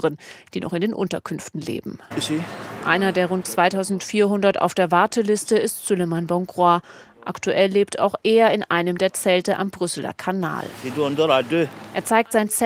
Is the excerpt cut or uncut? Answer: uncut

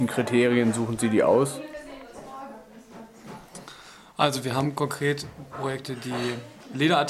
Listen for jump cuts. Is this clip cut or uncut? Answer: uncut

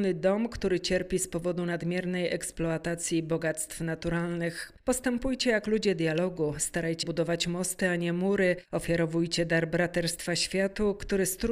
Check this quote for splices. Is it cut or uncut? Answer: cut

